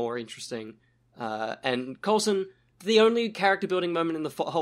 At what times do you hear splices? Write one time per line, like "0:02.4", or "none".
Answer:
0:02.7